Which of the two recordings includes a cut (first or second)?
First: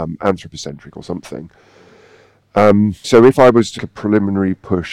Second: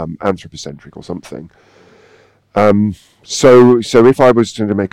first